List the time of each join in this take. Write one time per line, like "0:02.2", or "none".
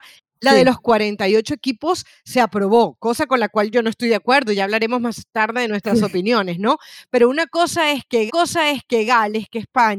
0:08.3